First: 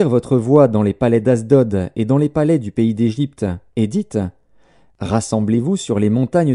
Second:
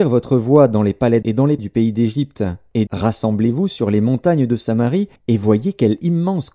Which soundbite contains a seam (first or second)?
second